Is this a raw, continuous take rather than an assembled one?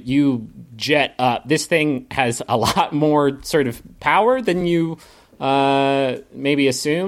yes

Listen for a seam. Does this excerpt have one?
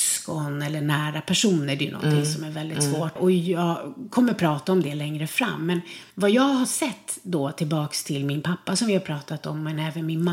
yes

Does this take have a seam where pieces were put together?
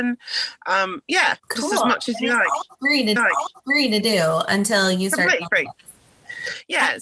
yes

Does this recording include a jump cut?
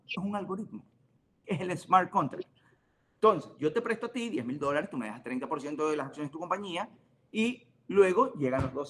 no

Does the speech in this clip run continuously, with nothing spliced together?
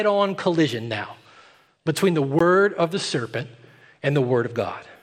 yes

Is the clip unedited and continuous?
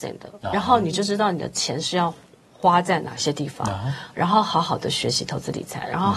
yes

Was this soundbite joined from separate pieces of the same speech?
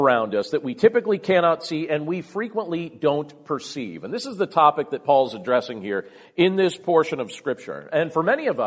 no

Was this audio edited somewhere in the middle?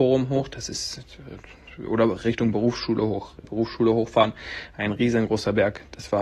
yes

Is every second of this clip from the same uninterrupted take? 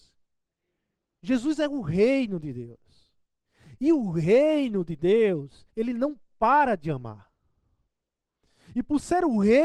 no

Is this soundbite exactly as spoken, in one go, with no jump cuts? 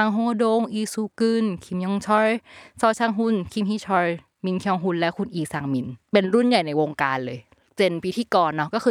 yes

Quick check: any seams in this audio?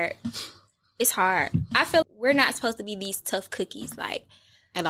yes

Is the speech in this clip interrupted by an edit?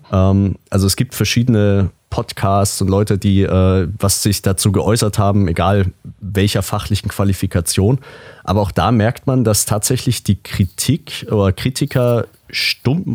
no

